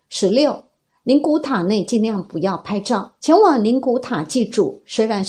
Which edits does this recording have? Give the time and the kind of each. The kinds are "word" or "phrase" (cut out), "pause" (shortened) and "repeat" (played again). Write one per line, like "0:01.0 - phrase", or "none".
0:03.2 - pause